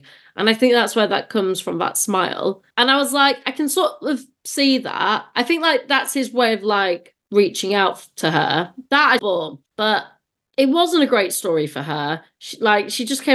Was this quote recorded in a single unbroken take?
no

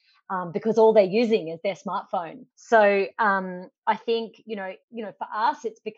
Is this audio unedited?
no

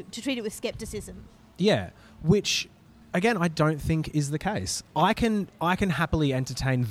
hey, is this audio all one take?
yes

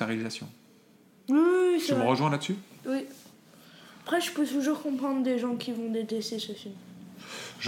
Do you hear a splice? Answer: no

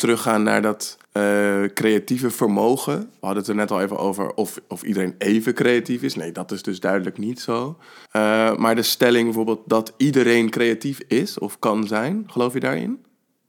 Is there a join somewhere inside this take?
yes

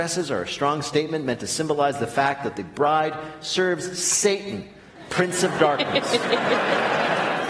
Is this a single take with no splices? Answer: yes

